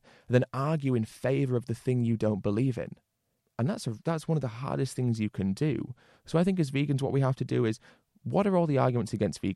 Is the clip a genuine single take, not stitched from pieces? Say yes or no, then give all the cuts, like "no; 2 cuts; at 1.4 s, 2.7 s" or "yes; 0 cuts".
no; 2 cuts; at 3.4 s, 4.0 s